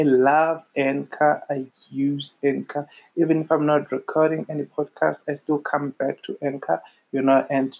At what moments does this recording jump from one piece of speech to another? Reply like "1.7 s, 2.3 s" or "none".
none